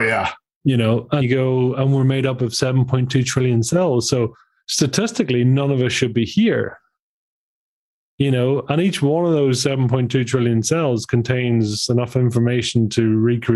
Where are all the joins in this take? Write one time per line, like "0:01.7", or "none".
0:01.2